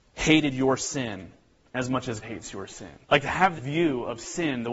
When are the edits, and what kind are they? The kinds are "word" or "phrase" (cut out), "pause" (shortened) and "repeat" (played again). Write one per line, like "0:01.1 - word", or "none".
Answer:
0:02.2 - word
0:03.0 - pause
0:03.6 - word